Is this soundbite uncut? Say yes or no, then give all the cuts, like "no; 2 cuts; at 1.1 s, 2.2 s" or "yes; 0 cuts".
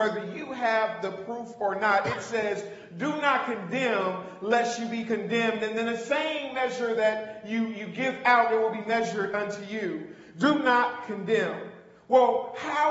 yes; 0 cuts